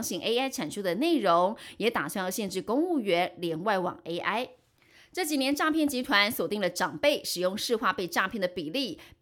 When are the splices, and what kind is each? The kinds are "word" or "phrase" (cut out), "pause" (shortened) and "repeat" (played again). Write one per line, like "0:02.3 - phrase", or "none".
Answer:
none